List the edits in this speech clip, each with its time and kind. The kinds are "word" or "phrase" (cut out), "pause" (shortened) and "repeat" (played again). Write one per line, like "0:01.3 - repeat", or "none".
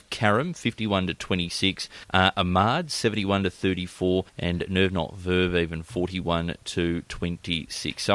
0:02.0 - pause
0:04.3 - pause